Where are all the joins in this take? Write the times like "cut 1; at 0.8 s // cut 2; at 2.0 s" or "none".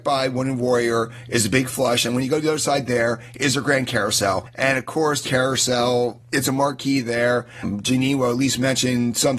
cut 1; at 5.2 s